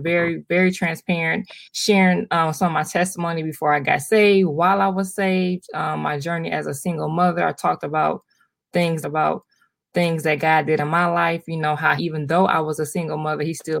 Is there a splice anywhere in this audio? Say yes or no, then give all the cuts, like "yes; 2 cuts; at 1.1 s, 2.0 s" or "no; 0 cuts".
yes; 3 cuts; at 1.7 s, 9.0 s, 12.0 s